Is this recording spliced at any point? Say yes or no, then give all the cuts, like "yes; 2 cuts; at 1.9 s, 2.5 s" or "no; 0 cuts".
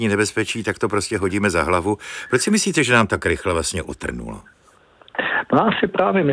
no; 0 cuts